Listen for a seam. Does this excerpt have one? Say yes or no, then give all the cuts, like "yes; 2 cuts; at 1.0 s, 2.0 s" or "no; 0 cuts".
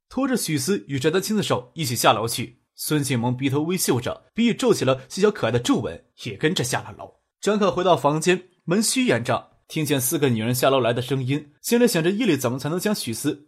yes; 6 cuts; at 2.7 s, 4.3 s, 6.1 s, 7.3 s, 9.6 s, 11.6 s